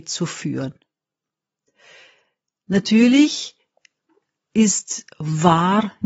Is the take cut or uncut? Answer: uncut